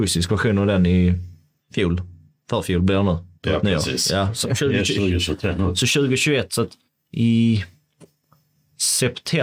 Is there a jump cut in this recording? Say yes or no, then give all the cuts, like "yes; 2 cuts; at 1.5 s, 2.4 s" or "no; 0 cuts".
yes; 4 cuts; at 1.6 s, 3.4 s, 4.4 s, 6.9 s